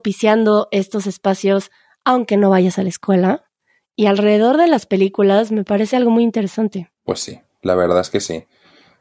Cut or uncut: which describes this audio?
uncut